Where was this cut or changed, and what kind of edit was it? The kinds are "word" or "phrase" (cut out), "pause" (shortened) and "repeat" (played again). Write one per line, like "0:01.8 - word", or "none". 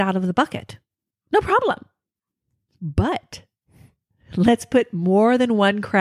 none